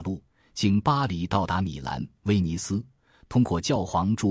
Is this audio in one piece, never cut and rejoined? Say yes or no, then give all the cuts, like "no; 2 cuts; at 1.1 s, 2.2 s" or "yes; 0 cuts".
yes; 0 cuts